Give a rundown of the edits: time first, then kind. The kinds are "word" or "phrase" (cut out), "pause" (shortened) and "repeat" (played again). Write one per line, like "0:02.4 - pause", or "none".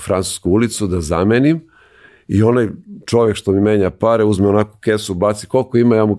none

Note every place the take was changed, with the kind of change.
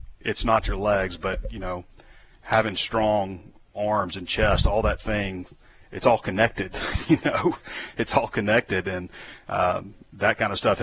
none

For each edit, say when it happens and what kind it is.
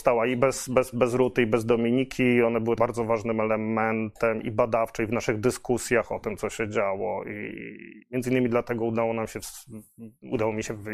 0:00.9 - word
0:02.8 - word
0:08.0 - pause

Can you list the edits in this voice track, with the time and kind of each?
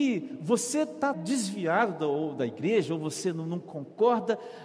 0:01.1 - word

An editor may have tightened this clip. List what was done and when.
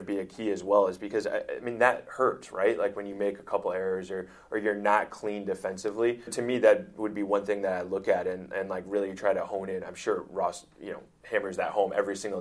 0:06.3 - word

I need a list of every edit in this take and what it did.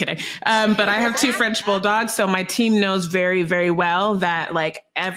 none

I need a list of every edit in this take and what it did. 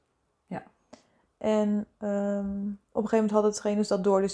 0:02.8 - pause

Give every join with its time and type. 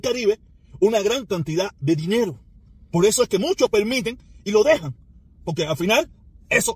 0:02.5 - pause

